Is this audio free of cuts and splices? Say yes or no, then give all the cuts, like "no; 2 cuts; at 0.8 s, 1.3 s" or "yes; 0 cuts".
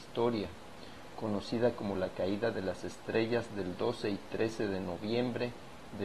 yes; 0 cuts